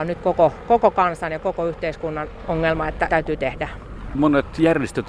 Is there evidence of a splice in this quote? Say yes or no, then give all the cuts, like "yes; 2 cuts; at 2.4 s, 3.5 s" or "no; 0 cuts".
yes; 2 cuts; at 3.1 s, 4.1 s